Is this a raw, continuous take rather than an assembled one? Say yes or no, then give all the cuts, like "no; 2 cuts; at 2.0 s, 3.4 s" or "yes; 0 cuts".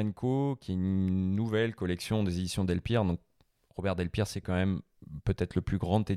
yes; 0 cuts